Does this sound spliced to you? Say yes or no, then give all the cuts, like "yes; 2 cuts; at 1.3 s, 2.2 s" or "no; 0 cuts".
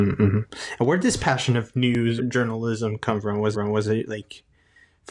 yes; 2 cuts; at 2.2 s, 3.5 s